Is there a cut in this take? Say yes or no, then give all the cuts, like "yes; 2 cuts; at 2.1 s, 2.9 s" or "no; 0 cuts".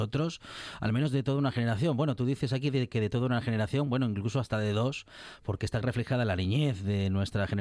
no; 0 cuts